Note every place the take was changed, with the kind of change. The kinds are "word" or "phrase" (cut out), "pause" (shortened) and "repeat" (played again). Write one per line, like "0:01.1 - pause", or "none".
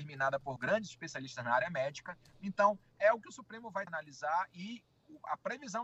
0:03.9 - word